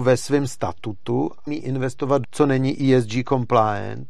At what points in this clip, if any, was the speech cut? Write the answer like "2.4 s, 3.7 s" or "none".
1.5 s, 2.2 s